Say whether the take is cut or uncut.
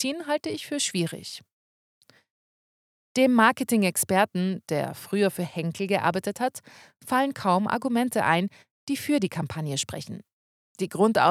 uncut